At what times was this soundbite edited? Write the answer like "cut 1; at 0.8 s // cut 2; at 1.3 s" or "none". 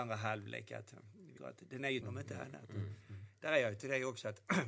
cut 1; at 1.4 s // cut 2; at 2.0 s // cut 3; at 3.8 s